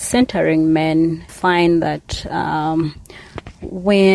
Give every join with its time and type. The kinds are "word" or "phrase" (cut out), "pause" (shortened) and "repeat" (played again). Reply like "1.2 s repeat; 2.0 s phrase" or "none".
1.3 s word